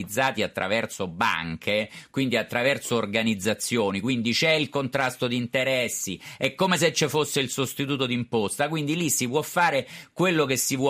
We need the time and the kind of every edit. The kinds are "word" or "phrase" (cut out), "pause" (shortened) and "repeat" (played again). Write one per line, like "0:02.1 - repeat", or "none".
none